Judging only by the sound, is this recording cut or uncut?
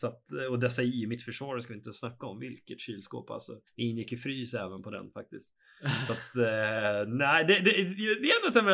cut